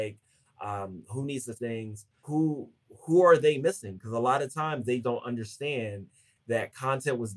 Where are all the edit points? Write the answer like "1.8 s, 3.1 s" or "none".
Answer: 1.5 s, 2.2 s, 5.0 s